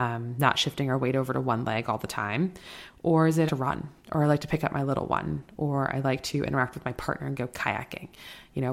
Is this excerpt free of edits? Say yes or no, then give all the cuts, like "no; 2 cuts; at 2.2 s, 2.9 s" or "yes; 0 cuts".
no; 2 cuts; at 3.5 s, 4.0 s